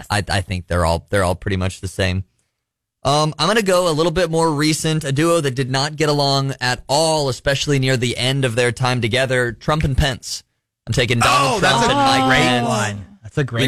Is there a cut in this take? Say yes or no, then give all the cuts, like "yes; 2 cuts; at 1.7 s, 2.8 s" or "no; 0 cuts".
no; 0 cuts